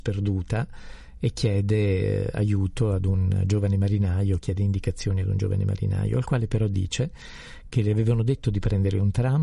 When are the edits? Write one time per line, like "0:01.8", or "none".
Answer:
none

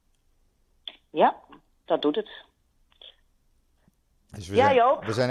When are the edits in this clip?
none

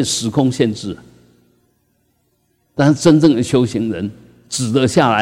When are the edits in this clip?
none

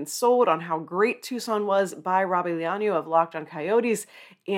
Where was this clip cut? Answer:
none

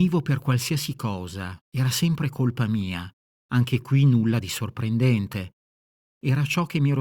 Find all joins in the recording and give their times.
0:01.6
0:03.2

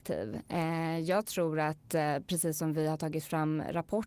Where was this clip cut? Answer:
none

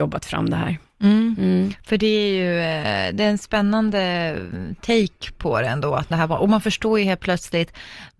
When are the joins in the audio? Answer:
0:06.1

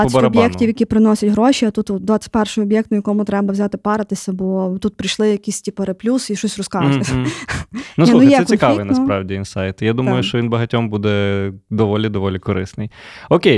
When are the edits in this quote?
none

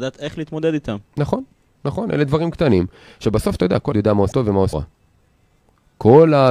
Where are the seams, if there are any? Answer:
0:01.8
0:03.9
0:04.3
0:04.7

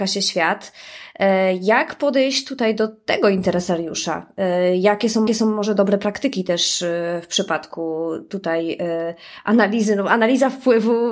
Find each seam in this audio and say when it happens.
0:05.3

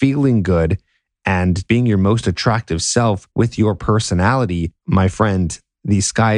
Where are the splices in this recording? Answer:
0:01.7
0:03.3
0:04.8

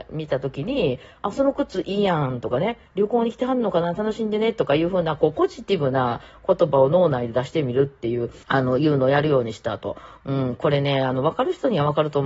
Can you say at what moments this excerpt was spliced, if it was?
0:02.9
0:08.4

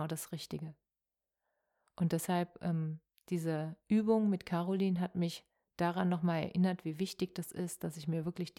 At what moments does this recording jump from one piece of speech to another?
none

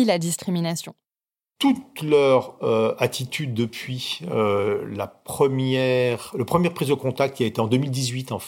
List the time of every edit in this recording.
none

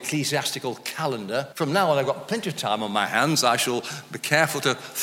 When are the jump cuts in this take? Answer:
0:01.5

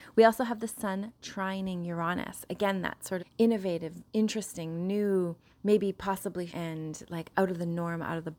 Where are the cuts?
0:03.2
0:05.5
0:06.5

